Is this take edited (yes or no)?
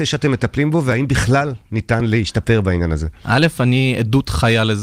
no